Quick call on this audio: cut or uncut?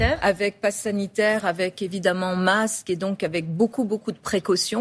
uncut